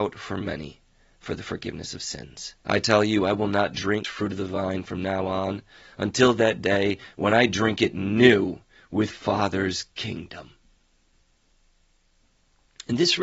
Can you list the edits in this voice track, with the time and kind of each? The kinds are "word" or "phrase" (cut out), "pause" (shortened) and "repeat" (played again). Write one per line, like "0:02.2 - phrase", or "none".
0:02.6 - pause
0:04.0 - phrase
0:09.1 - phrase